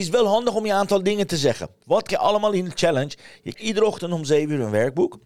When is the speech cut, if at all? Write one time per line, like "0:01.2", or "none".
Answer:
0:02.1
0:03.5